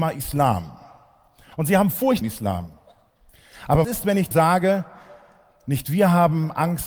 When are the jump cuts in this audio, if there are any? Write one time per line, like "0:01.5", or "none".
0:02.2
0:03.8
0:04.3